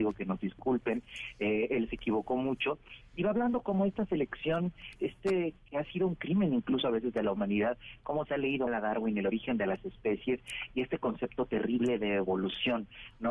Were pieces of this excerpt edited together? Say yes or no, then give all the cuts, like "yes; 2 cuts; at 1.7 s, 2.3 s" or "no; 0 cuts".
yes; 2 cuts; at 5.0 s, 8.7 s